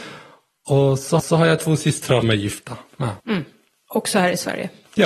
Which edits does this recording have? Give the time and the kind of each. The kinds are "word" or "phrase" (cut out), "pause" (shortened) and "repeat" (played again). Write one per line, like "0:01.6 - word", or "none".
0:01.2 - repeat
0:02.2 - word
0:03.2 - pause